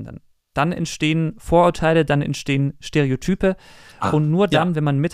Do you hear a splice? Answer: no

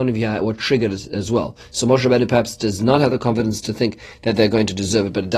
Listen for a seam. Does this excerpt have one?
no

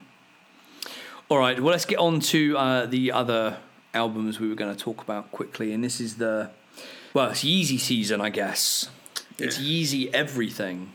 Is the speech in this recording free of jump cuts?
no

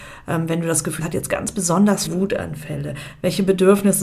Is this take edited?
yes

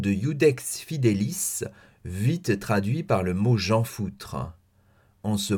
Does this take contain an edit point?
no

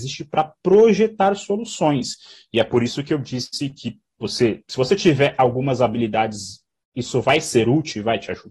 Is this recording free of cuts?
yes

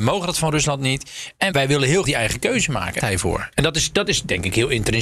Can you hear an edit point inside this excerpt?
yes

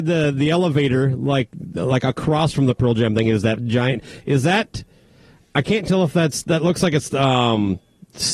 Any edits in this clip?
no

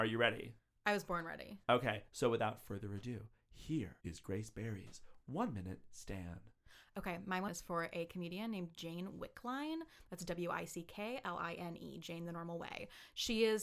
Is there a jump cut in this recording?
yes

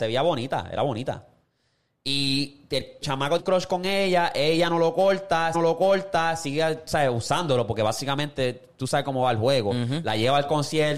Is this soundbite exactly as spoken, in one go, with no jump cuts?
no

